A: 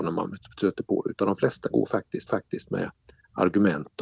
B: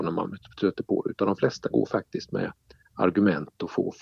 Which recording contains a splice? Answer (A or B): A